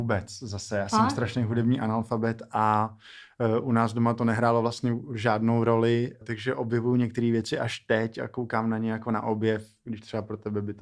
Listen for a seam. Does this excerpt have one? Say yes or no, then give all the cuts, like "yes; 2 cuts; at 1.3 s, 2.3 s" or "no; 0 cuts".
yes; 1 cut; at 6.2 s